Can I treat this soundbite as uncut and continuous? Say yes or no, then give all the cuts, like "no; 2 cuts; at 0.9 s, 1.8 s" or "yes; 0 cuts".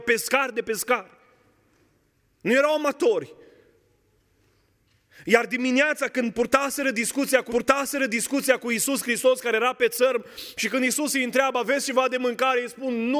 no; 1 cut; at 7.5 s